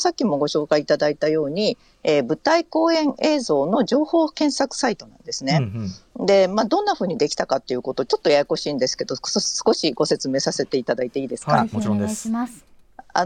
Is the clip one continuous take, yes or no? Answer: yes